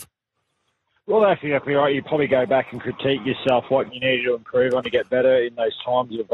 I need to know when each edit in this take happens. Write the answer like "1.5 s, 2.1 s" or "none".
none